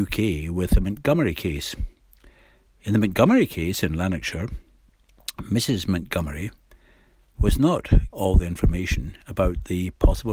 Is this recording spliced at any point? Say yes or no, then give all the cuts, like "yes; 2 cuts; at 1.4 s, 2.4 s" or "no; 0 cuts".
yes; 1 cut; at 8.1 s